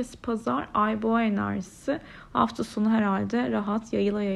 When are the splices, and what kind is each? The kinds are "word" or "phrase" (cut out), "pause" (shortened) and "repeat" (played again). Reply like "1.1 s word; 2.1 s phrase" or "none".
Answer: none